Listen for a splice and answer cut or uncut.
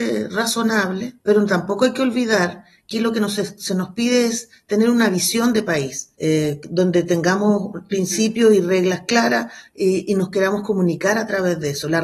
cut